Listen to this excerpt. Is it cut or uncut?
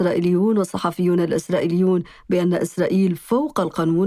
uncut